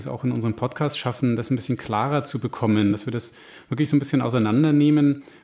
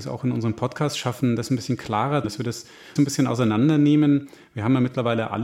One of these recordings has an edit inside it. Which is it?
second; 2 cuts; at 2.2 s, 3.0 s

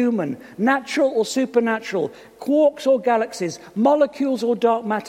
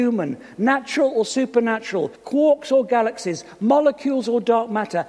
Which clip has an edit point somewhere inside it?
second; 1 cut; at 2.2 s

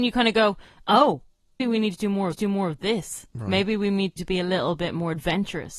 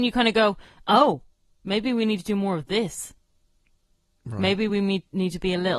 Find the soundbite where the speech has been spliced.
first; 4 cuts; at 1.6 s, 2.3 s, 3.3 s, 4.2 s

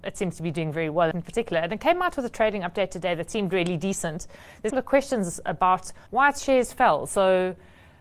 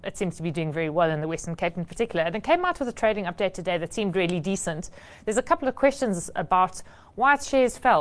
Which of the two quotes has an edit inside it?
first; 3 cuts; at 1.1 s, 4.7 s, 6.1 s

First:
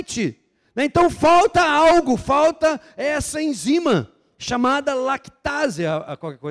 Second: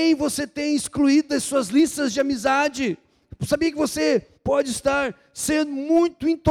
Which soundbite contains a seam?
second; 1 cut; at 4.3 s

